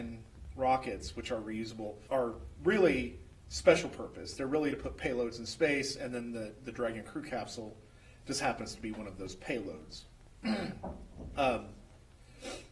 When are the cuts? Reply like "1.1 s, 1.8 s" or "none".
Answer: 2.1 s